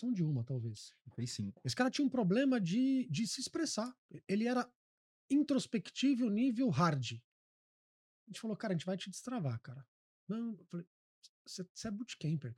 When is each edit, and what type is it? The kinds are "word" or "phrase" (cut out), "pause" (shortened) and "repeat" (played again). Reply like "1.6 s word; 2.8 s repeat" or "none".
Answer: none